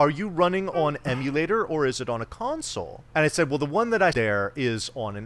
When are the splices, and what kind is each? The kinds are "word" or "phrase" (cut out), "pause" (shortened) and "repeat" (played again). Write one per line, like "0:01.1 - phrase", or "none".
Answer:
0:03.1 - pause
0:04.1 - word